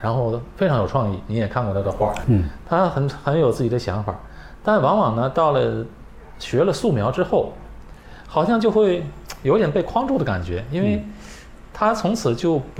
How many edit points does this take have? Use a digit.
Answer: 1